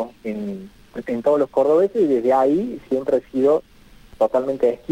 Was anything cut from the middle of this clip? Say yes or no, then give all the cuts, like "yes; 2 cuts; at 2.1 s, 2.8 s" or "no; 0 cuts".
no; 0 cuts